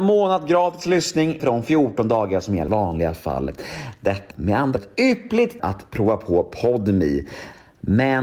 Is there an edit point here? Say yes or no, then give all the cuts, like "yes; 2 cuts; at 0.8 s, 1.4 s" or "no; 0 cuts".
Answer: yes; 5 cuts; at 1.4 s, 2.7 s, 4.3 s, 4.8 s, 5.6 s